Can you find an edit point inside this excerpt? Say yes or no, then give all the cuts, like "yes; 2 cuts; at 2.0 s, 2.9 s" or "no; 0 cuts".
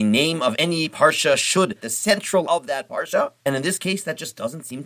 yes; 3 cuts; at 1.8 s, 2.4 s, 3.4 s